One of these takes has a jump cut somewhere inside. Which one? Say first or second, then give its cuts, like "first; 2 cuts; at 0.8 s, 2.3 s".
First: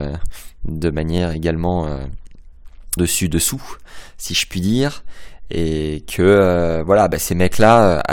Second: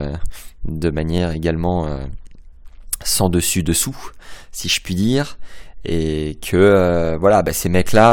first; 1 cut; at 3.0 s